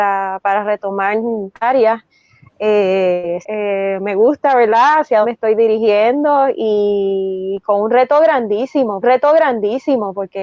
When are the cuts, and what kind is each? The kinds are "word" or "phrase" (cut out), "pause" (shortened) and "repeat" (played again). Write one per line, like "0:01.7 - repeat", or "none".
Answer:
0:01.5 - phrase
0:03.4 - phrase
0:05.2 - word
0:09.0 - repeat